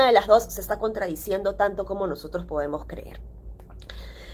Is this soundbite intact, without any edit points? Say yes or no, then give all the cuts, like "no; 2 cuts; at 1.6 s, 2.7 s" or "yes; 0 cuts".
yes; 0 cuts